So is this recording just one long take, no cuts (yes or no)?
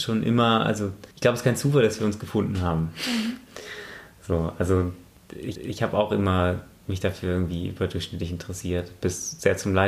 no